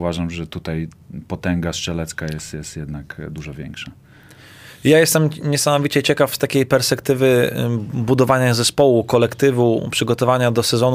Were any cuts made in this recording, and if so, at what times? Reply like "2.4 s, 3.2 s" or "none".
none